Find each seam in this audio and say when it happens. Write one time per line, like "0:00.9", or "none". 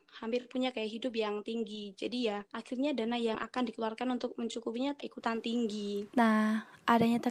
0:02.5
0:05.0
0:06.1